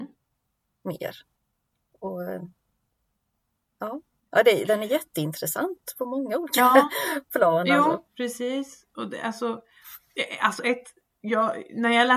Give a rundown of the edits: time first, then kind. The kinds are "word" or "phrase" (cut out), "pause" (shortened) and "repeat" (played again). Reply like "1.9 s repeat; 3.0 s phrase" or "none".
1.4 s pause; 4.2 s pause; 8.1 s pause